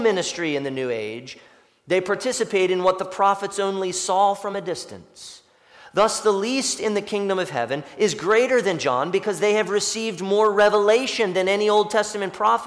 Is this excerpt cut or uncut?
uncut